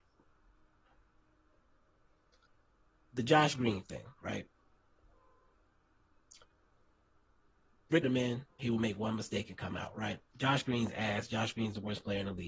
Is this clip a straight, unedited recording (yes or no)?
no